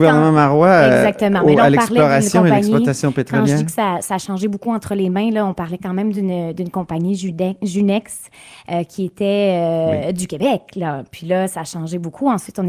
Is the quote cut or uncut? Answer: uncut